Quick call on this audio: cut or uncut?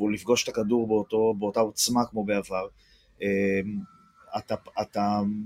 uncut